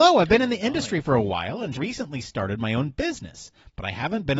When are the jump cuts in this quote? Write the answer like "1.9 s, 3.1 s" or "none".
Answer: 1.7 s